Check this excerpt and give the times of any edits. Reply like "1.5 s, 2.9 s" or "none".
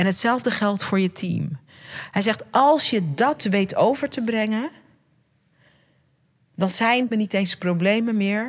7.1 s

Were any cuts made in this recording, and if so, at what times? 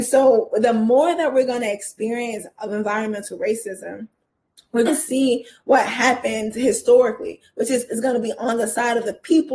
4.9 s, 7.9 s

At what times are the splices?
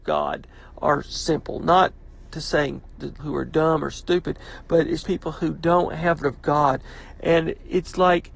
3.2 s, 5.0 s, 6.2 s

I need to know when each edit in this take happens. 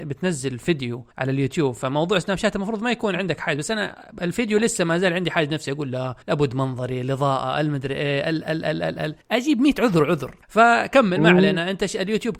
1.1 s, 6.2 s, 9.2 s, 10.4 s

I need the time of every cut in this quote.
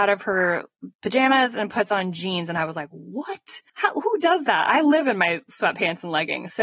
3.7 s

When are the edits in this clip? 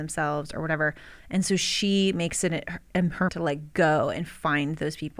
3.3 s

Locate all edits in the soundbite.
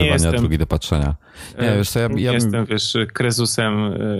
none

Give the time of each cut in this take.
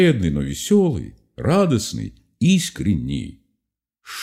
none

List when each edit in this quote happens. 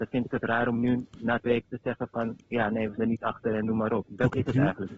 1.5 s, 2.4 s, 3.0 s

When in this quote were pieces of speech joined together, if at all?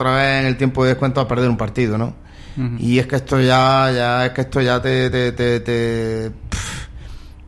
none

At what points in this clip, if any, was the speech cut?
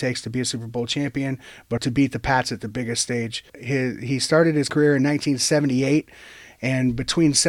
1.8 s, 3.5 s, 4.7 s

